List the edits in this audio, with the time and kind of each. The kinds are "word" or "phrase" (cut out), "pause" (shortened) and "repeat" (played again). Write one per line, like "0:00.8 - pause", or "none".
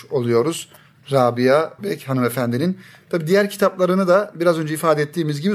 0:01.8 - word